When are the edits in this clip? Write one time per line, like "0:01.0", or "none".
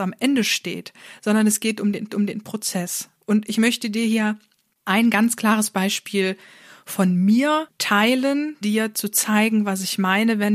0:02.1
0:08.6